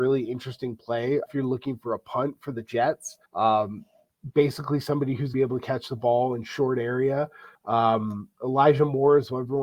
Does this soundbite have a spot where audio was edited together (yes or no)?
yes